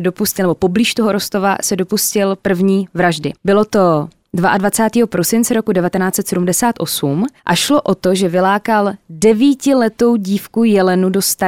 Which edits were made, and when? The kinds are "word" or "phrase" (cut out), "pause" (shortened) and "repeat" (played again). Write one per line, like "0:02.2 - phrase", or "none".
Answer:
0:03.4 - pause
0:07.4 - pause